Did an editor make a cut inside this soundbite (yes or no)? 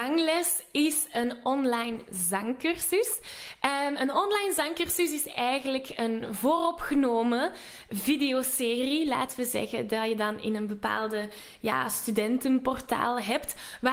no